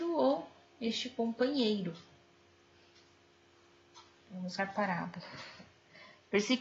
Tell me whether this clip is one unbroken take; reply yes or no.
no